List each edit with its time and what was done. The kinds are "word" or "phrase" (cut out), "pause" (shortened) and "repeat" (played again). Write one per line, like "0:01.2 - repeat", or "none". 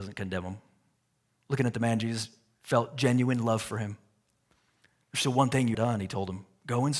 0:05.7 - word